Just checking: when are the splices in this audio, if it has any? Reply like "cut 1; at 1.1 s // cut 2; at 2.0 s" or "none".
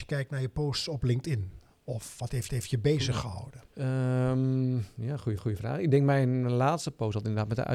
cut 1; at 2.5 s // cut 2; at 3.7 s // cut 3; at 5.4 s